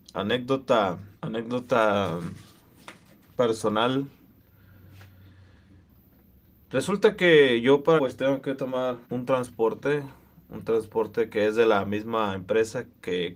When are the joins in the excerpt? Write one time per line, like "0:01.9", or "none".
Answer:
0:01.2
0:08.0
0:09.0